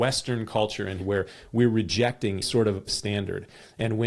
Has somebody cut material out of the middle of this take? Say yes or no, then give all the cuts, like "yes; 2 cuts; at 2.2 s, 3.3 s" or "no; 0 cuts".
yes; 3 cuts; at 1.0 s, 2.4 s, 2.9 s